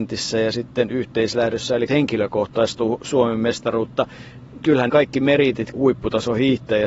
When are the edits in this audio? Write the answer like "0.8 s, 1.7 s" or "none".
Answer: 1.9 s, 4.9 s, 5.7 s